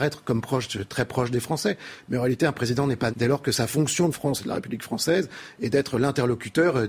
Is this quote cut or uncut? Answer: cut